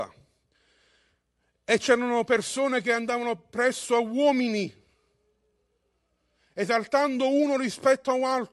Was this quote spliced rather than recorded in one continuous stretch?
no; 0 cuts

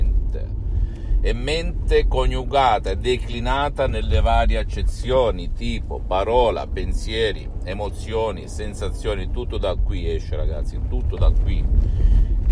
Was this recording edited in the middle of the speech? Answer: no; 0 cuts

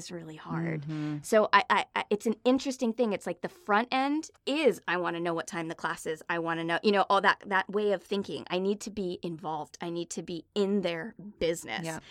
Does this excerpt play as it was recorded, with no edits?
no; 1 cut; at 4.4 s

